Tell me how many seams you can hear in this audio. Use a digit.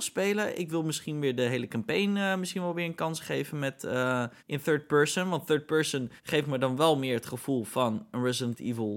2